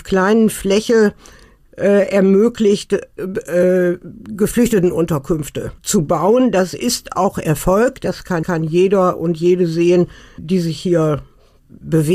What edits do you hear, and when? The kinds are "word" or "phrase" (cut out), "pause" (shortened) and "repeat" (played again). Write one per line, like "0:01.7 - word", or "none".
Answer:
0:05.8 - pause
0:08.4 - repeat
0:10.4 - word

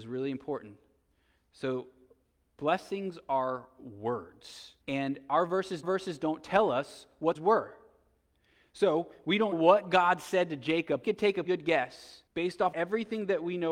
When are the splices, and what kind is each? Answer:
0:04.8 - pause
0:05.8 - repeat
0:07.3 - phrase
0:09.5 - word
0:11.0 - phrase
0:11.4 - word
0:12.3 - pause
0:12.7 - word

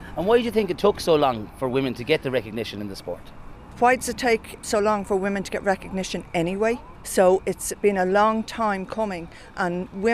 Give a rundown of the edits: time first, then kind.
0:04.6 - word

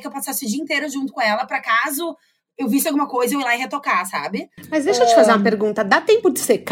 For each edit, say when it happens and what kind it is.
none

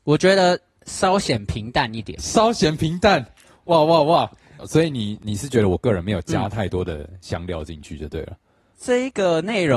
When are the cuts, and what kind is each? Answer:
0:02.2 - word

